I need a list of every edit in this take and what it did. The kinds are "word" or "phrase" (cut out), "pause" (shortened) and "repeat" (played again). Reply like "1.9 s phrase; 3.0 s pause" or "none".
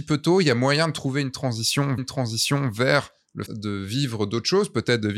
2.0 s repeat; 3.5 s word